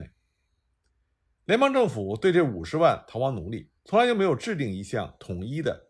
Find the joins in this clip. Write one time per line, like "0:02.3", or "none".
0:03.8

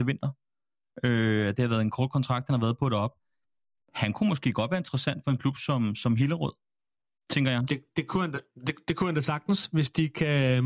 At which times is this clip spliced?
none

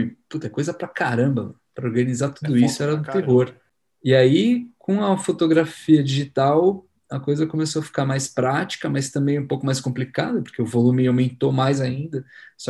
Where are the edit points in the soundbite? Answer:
none

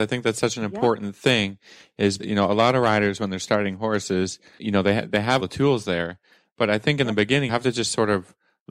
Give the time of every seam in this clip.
0:02.2
0:04.6
0:05.4
0:07.5

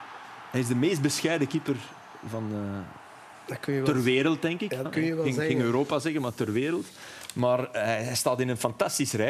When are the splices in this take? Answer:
0:04.8

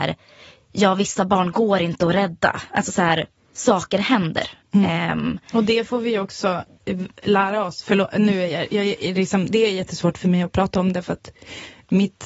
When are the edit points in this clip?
none

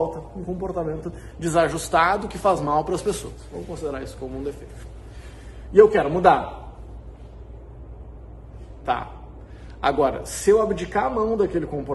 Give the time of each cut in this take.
none

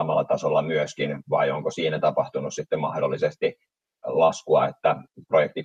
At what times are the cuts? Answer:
none

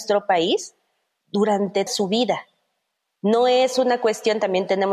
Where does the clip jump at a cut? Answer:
0:01.9

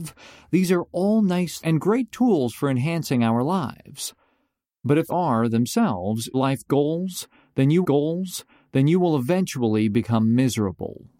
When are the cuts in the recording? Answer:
0:01.6
0:05.1
0:06.3
0:07.8

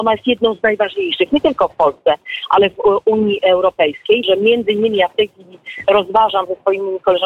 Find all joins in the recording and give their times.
0:04.2

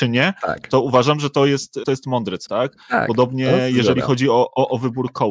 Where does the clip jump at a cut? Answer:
0:01.8
0:02.5

